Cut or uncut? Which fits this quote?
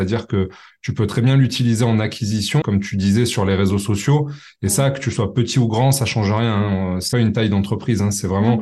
cut